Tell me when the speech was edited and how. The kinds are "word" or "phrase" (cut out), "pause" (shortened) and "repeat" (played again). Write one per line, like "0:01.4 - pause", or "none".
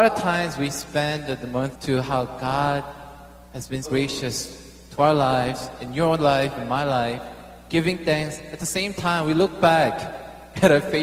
0:01.7 - phrase
0:03.8 - word